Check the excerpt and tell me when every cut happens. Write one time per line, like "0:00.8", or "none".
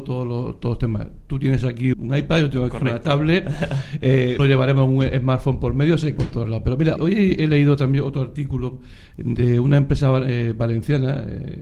0:01.9
0:04.4
0:06.2
0:07.0